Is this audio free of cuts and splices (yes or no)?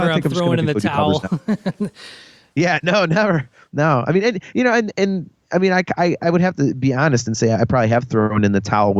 yes